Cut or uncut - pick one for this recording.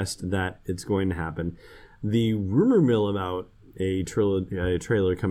uncut